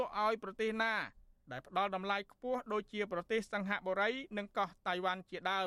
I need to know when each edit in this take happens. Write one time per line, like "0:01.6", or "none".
none